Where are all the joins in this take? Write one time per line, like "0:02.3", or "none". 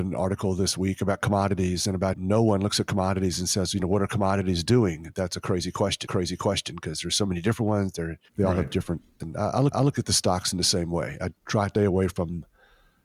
0:02.1
0:06.1
0:08.3
0:09.2
0:09.7
0:11.4
0:11.8

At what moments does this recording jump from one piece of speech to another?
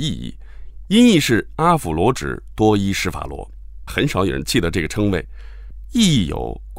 0:03.9

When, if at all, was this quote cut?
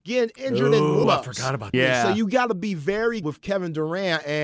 0:01.0
0:01.7
0:03.2

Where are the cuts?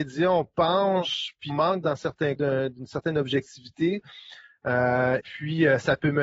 0:01.5
0:02.4
0:05.2

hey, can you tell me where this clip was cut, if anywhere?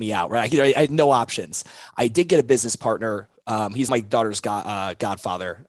0:03.9

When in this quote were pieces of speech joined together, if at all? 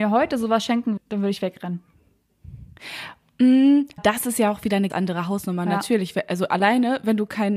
0:01.0
0:04.0
0:04.9

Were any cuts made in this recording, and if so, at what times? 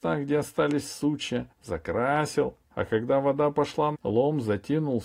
0:01.5
0:03.9

